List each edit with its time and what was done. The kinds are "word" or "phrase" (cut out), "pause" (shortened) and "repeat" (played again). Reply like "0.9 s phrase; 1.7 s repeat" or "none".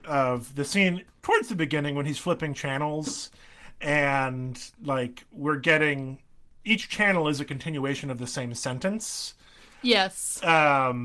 none